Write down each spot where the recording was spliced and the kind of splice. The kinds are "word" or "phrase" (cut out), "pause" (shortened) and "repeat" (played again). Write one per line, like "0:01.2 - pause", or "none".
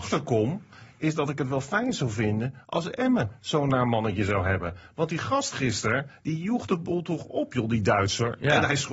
none